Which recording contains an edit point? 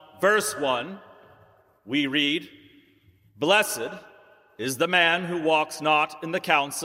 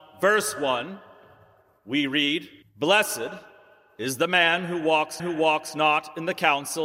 second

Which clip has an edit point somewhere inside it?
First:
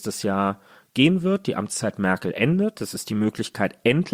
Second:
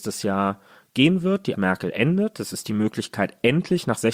second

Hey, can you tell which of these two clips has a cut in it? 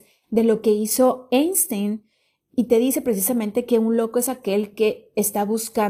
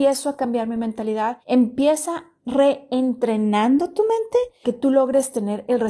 second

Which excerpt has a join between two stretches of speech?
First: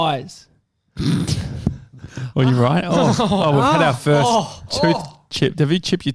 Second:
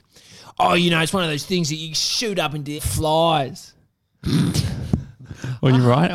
second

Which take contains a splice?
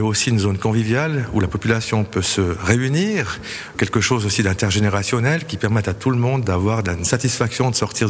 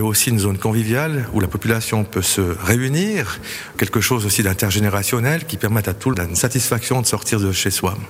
second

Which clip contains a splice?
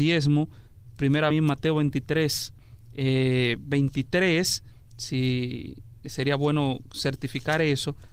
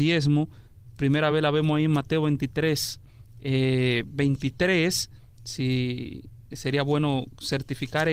first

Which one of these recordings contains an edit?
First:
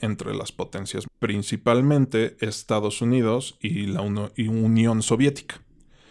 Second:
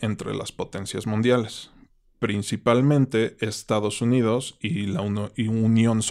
first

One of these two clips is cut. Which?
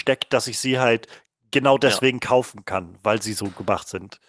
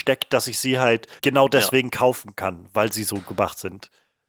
second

